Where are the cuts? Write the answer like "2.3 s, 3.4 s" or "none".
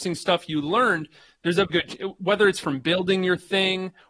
1.7 s